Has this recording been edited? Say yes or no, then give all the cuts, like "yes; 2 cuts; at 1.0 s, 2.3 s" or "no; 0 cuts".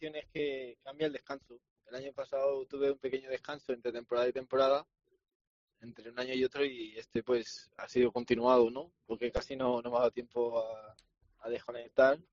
no; 0 cuts